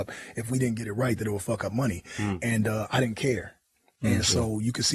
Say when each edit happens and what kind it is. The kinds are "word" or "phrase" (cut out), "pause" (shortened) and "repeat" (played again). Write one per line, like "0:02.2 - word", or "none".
none